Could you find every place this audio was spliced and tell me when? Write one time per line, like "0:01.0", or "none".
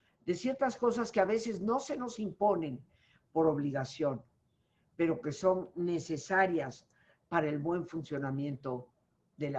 none